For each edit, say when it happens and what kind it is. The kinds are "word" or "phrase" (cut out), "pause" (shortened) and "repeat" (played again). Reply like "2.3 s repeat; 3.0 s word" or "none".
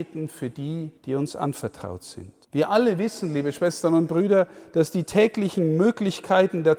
1.0 s pause; 2.4 s pause